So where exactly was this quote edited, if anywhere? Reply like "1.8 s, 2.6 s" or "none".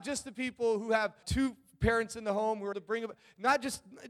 1.2 s, 2.7 s